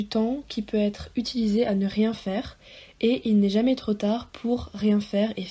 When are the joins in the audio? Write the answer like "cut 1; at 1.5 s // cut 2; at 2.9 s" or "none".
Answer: none